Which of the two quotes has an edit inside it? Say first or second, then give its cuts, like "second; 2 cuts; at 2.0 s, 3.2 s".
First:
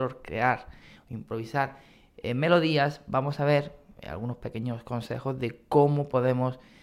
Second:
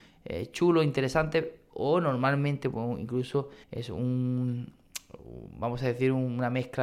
second; 1 cut; at 3.6 s